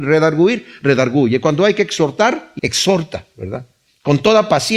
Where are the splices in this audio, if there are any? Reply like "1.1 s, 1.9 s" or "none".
2.6 s